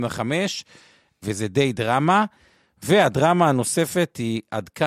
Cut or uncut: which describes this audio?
uncut